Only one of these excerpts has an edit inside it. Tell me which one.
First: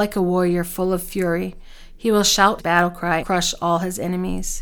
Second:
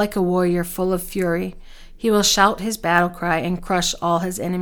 first; 2 cuts; at 2.6 s, 3.2 s

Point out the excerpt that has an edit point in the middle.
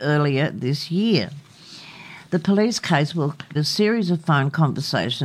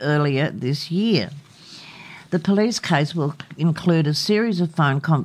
first; 1 cut; at 3.5 s

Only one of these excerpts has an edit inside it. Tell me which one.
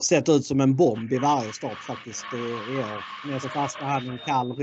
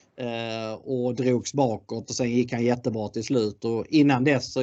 first; 1 cut; at 3.4 s

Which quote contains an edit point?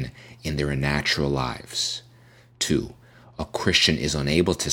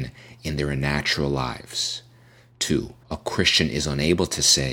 second; 1 cut; at 3.0 s

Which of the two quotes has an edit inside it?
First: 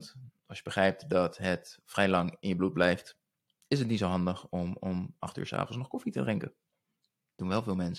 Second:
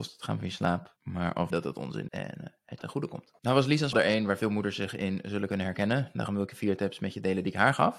second; 6 cuts; at 1.0 s, 1.5 s, 2.1 s, 2.8 s, 3.4 s, 3.9 s

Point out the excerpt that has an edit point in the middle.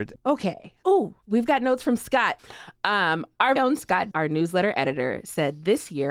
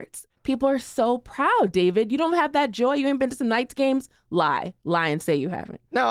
first; 3 cuts; at 1.2 s, 3.6 s, 4.1 s

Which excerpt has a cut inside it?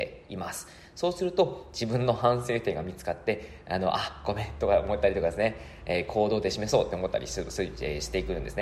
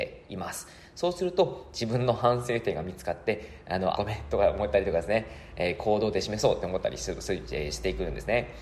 second; 1 cut; at 3.9 s

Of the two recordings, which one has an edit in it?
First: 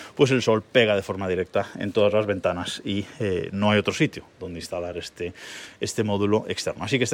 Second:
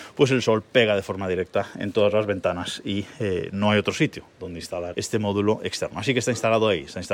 second; 1 cut; at 4.9 s

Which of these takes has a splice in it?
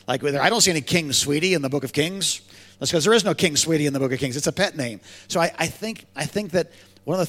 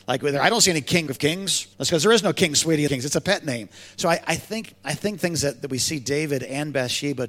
second; 4 cuts; at 1.1 s, 1.7 s, 2.9 s, 5.2 s

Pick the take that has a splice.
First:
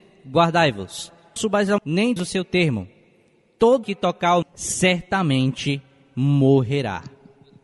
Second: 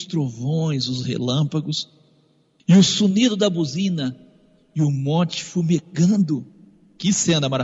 first; 5 cuts; at 1.4 s, 1.8 s, 2.2 s, 3.8 s, 4.4 s

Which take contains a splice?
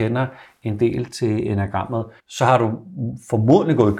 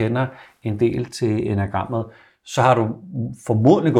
first; 1 cut; at 2.2 s

